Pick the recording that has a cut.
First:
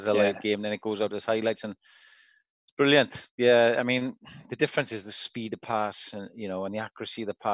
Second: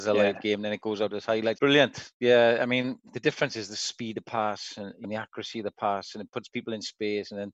second; 3 cuts; at 1.6 s, 3.1 s, 5.0 s

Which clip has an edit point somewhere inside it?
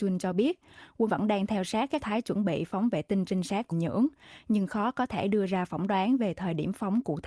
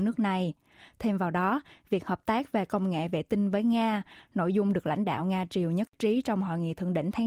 first; 3 cuts; at 1.1 s, 2.0 s, 3.7 s

